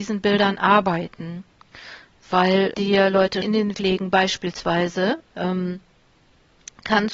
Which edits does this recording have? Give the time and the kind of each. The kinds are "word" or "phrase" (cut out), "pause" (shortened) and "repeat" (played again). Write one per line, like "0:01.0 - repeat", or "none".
0:02.7 - word
0:03.4 - word
0:03.7 - word